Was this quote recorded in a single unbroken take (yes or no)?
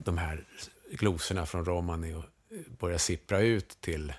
yes